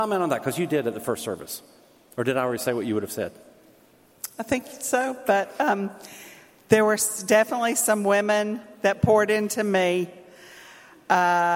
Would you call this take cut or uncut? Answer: uncut